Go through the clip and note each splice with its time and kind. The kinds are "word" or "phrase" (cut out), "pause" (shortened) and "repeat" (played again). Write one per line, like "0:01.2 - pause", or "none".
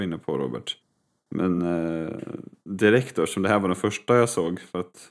none